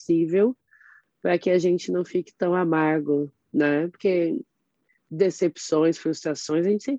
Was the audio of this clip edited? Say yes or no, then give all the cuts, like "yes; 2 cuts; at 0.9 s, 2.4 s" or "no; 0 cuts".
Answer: no; 0 cuts